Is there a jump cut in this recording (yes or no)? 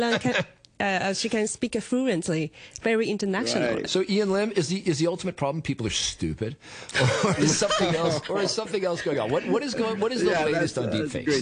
no